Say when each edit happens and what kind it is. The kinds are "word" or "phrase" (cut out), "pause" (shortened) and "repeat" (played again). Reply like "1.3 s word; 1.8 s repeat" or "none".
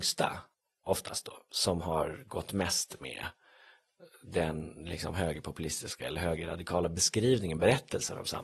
1.5 s pause